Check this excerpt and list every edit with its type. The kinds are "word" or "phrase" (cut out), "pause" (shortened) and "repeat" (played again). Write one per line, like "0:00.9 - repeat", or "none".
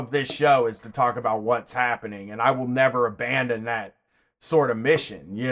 none